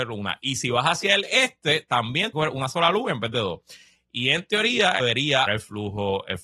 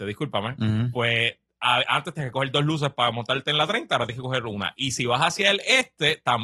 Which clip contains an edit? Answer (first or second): first